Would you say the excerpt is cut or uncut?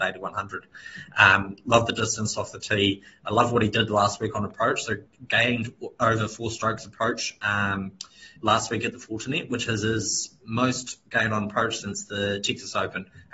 cut